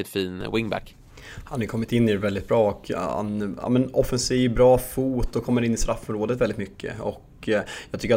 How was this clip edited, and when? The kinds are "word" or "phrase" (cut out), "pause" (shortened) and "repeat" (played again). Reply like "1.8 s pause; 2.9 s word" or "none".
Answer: none